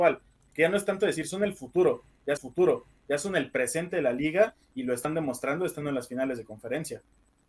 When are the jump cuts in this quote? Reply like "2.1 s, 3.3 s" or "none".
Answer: 2.4 s